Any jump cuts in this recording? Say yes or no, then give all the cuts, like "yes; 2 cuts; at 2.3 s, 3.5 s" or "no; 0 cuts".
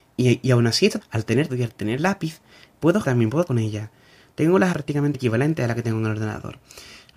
yes; 7 cuts; at 1.0 s, 1.5 s, 2.0 s, 3.0 s, 3.5 s, 4.7 s, 5.1 s